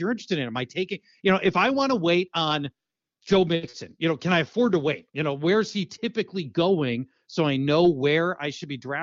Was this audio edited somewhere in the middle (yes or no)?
no